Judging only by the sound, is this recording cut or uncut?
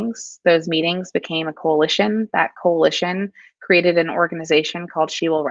uncut